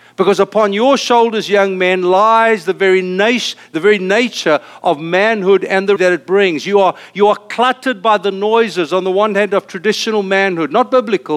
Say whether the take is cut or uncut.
cut